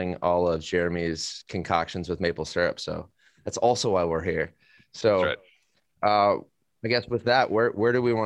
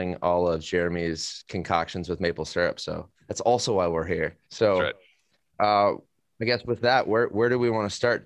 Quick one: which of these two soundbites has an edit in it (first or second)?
second